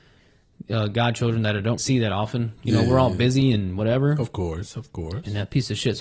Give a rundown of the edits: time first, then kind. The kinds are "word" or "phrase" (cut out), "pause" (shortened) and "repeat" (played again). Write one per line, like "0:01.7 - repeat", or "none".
0:01.8 - word